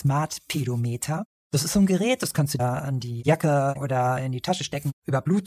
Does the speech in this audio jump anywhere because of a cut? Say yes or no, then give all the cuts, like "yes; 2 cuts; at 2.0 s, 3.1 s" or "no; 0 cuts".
yes; 2 cuts; at 2.6 s, 3.8 s